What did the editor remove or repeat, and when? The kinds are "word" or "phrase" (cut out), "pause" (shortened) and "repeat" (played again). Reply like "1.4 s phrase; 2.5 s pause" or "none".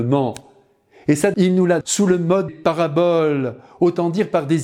1.3 s word; 1.8 s word; 2.5 s word